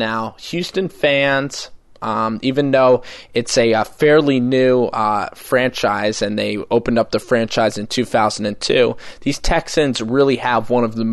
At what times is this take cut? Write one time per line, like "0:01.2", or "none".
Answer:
none

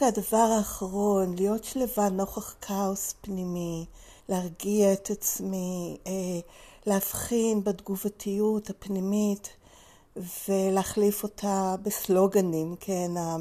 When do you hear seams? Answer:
0:04.2

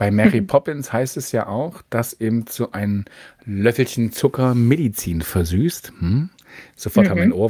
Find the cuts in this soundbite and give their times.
none

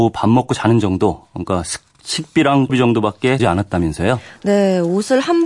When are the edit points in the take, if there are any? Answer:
0:02.7
0:03.4

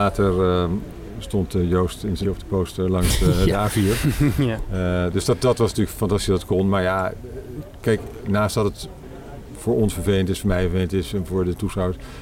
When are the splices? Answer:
0:02.2

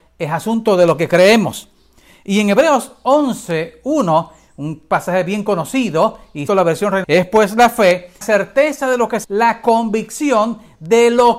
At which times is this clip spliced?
0:06.5
0:07.0
0:08.2
0:09.2

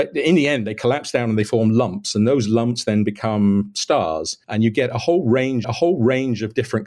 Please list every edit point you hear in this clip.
0:04.4
0:05.6

